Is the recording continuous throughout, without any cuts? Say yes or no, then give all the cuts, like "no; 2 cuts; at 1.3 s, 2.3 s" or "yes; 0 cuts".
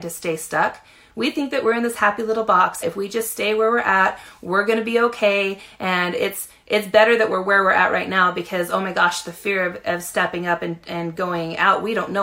no; 1 cut; at 2.8 s